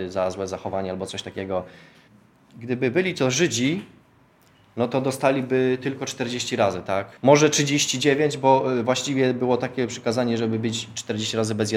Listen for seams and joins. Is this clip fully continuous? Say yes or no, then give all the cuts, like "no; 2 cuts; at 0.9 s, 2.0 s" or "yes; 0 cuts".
no; 2 cuts; at 2.1 s, 7.2 s